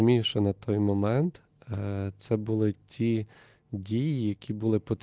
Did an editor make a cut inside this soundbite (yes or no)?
no